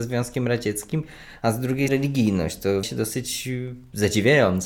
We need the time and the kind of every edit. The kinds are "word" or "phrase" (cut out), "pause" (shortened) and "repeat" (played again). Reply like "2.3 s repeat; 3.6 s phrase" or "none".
1.9 s word; 2.8 s word